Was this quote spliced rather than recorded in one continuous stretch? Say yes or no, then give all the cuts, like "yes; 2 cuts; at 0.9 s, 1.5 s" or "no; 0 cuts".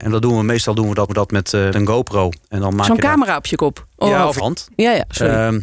yes; 4 cuts; at 1.1 s, 1.7 s, 2.4 s, 4.4 s